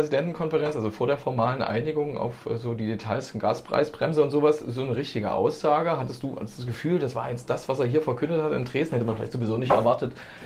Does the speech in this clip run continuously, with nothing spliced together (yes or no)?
yes